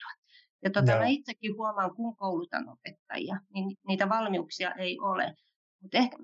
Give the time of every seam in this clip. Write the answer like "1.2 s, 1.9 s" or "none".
none